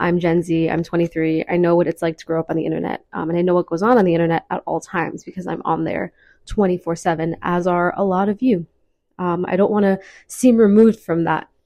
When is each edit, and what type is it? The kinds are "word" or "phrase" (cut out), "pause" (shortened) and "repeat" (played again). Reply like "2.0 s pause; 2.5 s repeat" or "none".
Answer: none